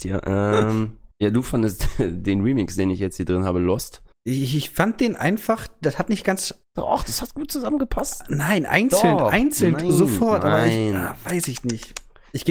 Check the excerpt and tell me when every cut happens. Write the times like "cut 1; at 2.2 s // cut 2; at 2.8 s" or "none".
cut 1; at 1.1 s // cut 2; at 4.1 s // cut 3; at 6.6 s